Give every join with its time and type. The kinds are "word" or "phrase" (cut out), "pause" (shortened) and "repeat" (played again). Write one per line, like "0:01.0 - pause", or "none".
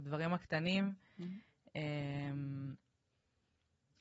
none